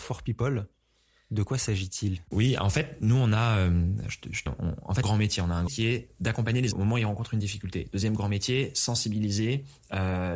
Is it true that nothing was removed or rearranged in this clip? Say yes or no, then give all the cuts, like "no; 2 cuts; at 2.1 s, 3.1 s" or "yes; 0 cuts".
no; 4 cuts; at 4.5 s, 5.0 s, 5.7 s, 6.7 s